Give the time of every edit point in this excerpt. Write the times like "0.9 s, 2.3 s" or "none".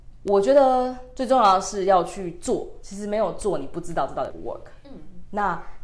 4.3 s